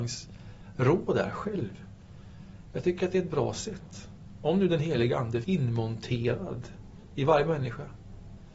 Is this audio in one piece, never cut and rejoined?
no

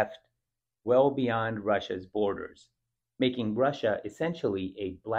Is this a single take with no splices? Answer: yes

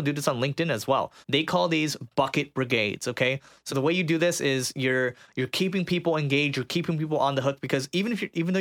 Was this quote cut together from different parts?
yes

